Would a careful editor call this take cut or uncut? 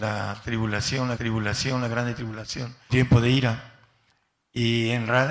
cut